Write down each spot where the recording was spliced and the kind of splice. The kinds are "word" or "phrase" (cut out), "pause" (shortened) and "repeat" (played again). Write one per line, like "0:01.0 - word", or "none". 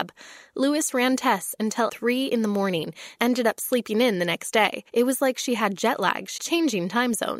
0:01.9 - word
0:03.2 - word
0:04.9 - pause
0:06.4 - phrase